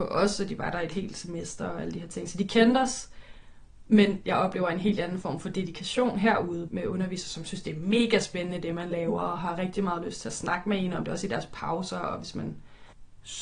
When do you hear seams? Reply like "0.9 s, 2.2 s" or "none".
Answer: 6.7 s

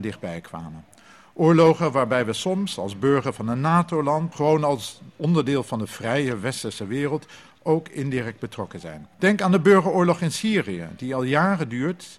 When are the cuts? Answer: 4.3 s, 9.1 s

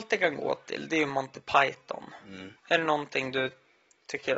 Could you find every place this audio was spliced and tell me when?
2.6 s

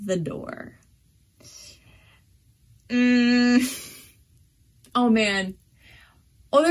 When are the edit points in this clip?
none

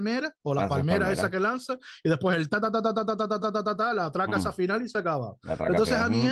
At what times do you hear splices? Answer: 3.4 s

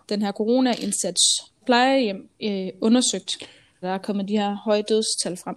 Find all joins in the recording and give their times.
1.6 s, 2.3 s, 3.8 s

